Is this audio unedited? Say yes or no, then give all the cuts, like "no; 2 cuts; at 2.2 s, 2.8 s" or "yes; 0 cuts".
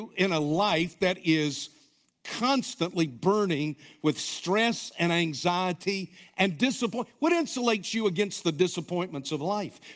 yes; 0 cuts